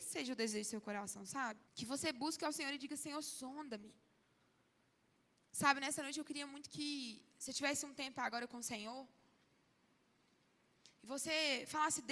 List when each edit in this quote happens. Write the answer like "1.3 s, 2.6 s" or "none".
1.7 s